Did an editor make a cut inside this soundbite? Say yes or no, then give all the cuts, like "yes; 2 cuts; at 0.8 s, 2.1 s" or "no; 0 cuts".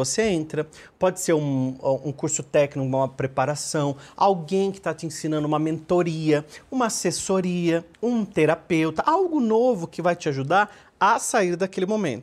yes; 1 cut; at 7.9 s